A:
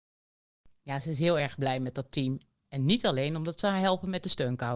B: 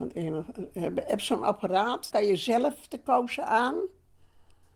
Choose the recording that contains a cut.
B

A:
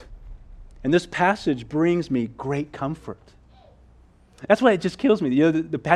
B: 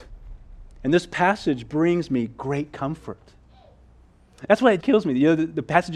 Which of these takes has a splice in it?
B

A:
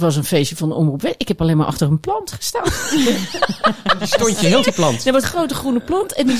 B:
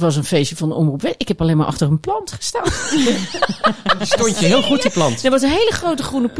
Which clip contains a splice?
A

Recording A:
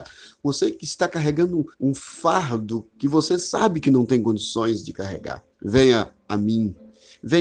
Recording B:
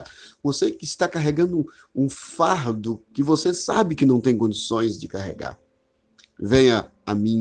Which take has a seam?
A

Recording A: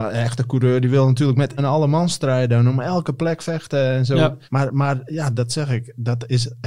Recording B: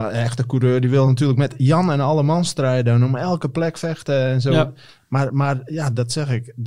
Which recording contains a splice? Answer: A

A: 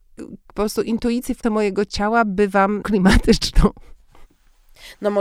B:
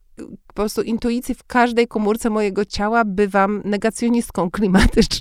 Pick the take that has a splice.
A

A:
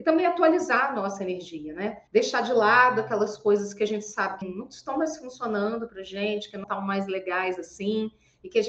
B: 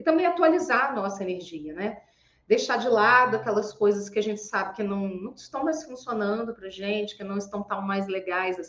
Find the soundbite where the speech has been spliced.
A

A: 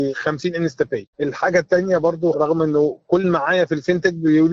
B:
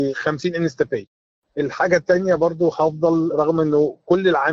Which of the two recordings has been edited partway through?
A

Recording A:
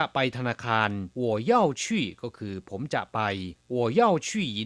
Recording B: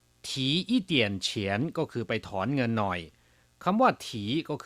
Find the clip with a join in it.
A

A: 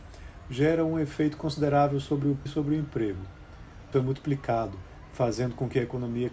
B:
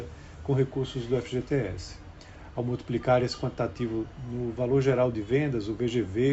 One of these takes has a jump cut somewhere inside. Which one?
A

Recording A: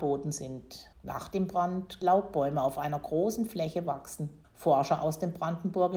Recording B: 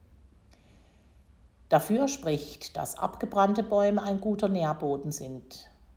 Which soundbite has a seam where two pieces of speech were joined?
A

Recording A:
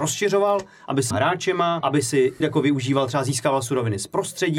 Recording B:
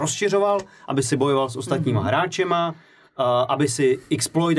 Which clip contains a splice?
A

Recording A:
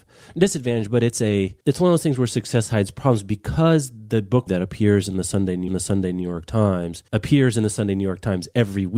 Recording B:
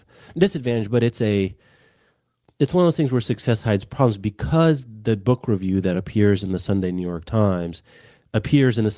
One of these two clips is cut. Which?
A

